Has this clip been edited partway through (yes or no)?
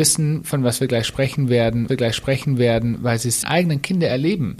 yes